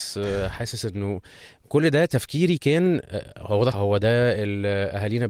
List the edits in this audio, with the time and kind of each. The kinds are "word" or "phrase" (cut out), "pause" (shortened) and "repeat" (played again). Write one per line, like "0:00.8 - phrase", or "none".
0:03.7 - word